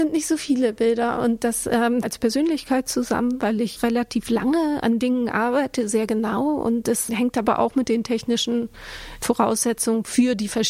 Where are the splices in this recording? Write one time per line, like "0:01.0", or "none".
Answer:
0:02.0
0:03.8
0:07.1